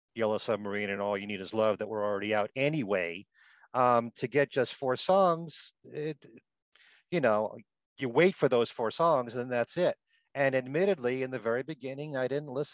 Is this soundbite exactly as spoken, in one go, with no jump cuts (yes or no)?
yes